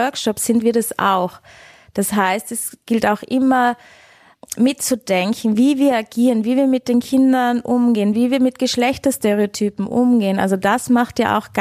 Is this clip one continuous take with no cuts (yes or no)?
yes